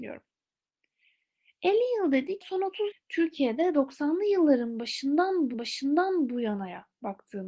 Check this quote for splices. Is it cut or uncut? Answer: cut